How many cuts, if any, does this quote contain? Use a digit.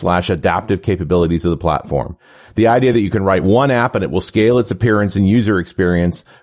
0